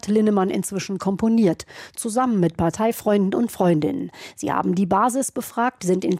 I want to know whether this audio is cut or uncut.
uncut